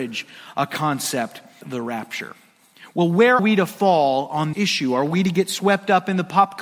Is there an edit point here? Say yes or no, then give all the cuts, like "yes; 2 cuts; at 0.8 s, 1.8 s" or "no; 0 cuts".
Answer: yes; 3 cuts; at 1.6 s, 3.4 s, 4.5 s